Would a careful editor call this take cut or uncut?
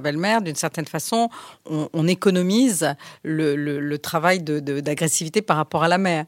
uncut